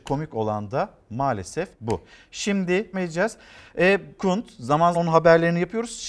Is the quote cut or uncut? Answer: cut